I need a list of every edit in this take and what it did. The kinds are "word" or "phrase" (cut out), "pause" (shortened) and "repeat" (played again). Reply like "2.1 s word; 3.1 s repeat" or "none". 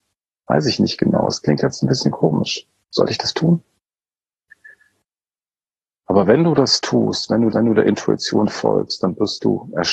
3.3 s word; 7.5 s repeat